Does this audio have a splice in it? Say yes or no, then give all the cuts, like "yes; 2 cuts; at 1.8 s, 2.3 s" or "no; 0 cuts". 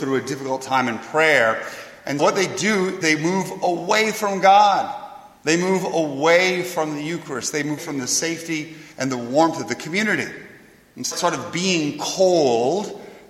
yes; 6 cuts; at 2.2 s, 3.0 s, 5.4 s, 7.8 s, 8.9 s, 11.1 s